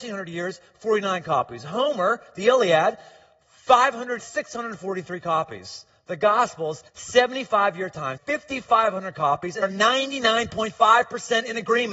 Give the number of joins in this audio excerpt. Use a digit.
4